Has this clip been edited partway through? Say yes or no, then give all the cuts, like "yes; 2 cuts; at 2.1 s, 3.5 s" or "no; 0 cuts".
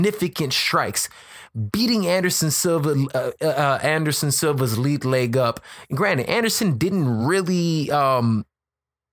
no; 0 cuts